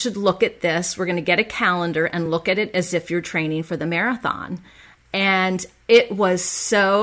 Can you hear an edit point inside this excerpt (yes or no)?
no